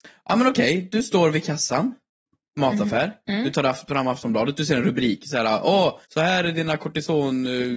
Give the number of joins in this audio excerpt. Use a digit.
1